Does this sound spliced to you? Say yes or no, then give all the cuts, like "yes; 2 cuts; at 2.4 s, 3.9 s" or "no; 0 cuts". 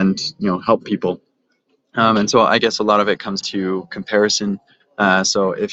yes; 1 cut; at 3.4 s